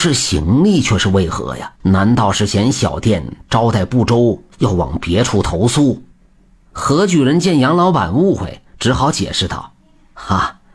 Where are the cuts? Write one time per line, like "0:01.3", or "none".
0:01.7
0:04.5